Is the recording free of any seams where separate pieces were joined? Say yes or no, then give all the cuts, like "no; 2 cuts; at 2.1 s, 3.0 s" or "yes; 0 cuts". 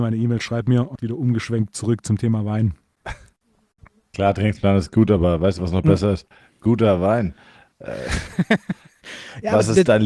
no; 1 cut; at 1.0 s